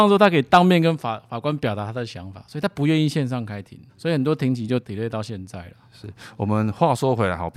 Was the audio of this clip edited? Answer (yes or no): yes